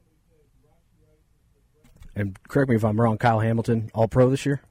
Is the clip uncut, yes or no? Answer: yes